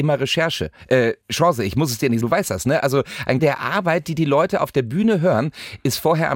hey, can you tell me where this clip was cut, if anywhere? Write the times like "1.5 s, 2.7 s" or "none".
1.2 s, 2.2 s, 3.4 s